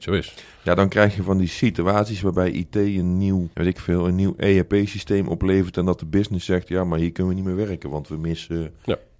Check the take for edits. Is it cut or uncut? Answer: cut